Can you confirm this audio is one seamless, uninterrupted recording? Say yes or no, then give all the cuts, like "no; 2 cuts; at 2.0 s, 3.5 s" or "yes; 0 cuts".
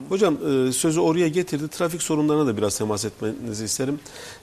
yes; 0 cuts